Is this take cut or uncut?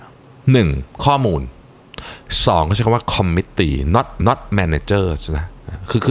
cut